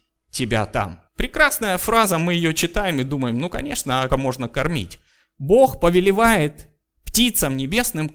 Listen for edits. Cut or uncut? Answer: cut